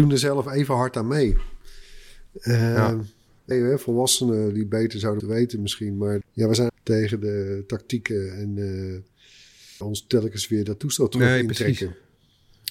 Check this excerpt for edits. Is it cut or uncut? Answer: cut